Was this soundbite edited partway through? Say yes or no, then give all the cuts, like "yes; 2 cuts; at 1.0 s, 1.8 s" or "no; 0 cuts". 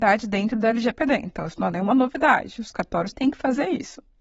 yes; 1 cut; at 3.1 s